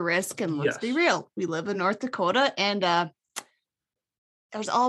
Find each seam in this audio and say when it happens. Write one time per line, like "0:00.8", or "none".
none